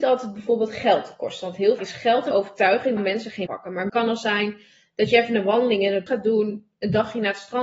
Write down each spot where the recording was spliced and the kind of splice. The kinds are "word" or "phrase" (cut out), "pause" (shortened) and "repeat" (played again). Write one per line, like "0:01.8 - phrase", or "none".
0:01.8 - word
0:02.3 - word
0:03.0 - word
0:03.5 - word
0:03.9 - word
0:06.1 - word

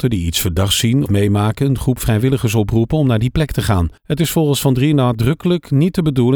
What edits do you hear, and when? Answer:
0:01.1 - word
0:04.0 - pause

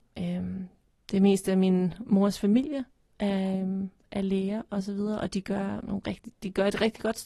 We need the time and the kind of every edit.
none

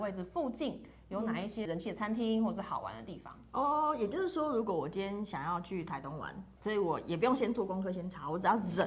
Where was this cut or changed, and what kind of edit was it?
0:06.6 - word

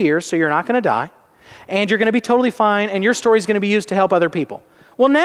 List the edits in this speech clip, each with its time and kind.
none

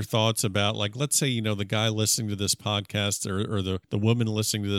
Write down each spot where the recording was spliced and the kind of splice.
0:03.8 - pause

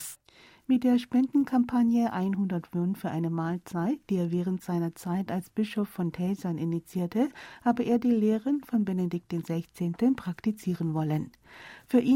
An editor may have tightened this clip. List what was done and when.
none

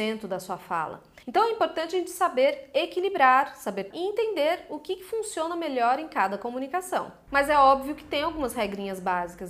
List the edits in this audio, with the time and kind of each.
0:01.2 - pause
0:03.9 - word

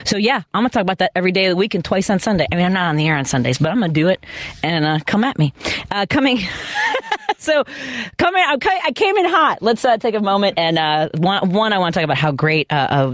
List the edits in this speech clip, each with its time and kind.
none

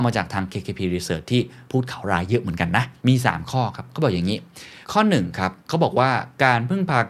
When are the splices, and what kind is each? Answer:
0:01.7 - pause
0:03.0 - pause
0:04.8 - pause
0:05.6 - pause

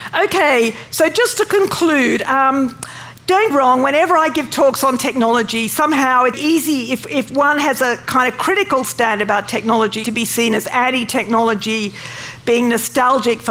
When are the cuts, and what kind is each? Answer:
0:03.5 - phrase
0:06.3 - word
0:10.0 - phrase

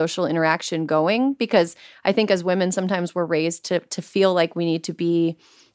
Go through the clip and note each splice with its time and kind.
none

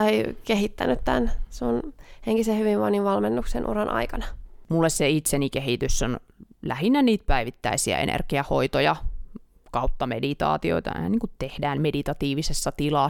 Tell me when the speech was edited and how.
none

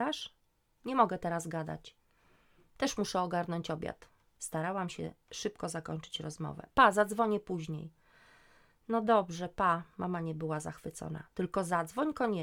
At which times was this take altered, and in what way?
none

